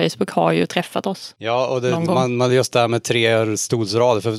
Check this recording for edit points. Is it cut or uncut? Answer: uncut